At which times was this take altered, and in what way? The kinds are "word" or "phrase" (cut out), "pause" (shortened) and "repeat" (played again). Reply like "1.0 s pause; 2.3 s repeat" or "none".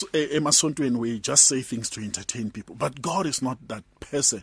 none